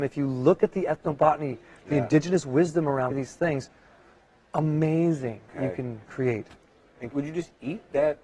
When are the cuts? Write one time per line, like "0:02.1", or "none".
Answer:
0:03.1
0:05.5
0:07.1